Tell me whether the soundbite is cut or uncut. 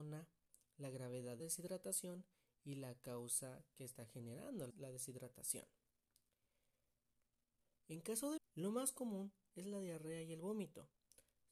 cut